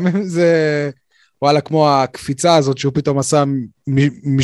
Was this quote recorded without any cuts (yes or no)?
yes